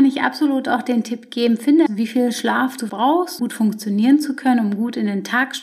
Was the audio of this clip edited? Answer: yes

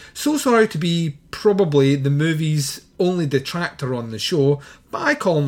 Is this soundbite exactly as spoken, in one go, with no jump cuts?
yes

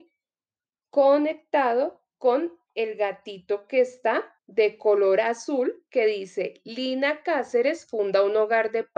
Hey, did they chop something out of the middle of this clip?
yes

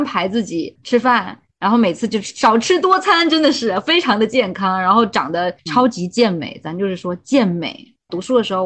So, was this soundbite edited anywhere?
yes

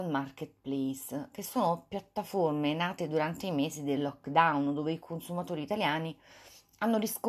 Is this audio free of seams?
yes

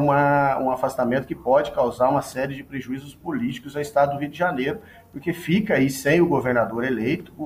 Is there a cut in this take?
no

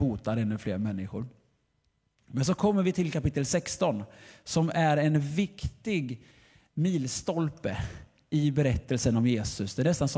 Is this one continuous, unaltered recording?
yes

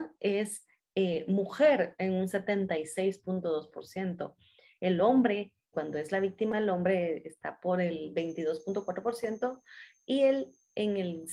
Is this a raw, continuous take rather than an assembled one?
no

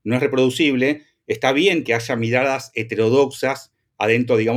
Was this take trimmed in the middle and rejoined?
no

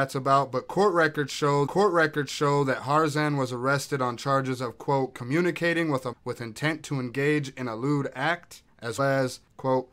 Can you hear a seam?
yes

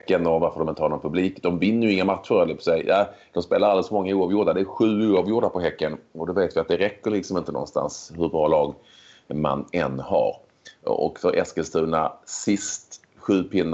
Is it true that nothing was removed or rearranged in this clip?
yes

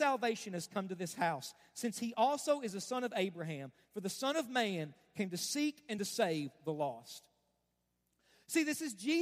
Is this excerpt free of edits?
yes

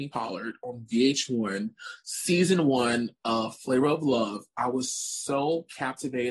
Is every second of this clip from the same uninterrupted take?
yes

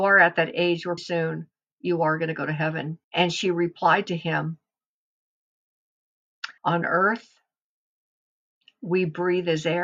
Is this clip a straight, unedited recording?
no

